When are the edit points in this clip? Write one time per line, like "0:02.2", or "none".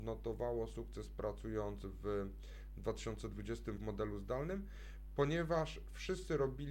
0:03.8